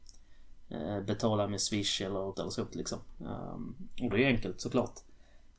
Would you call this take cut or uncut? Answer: cut